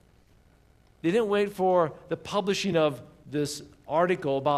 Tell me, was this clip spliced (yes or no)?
no